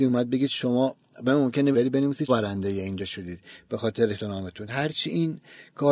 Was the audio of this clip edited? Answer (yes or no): yes